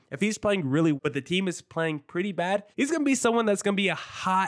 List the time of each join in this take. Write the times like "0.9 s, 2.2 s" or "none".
1.0 s, 2.7 s